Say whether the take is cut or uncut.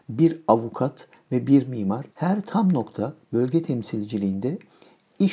cut